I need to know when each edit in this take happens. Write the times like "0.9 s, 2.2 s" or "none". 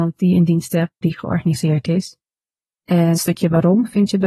1.0 s, 3.1 s